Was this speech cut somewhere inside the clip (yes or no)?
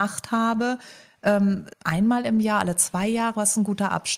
yes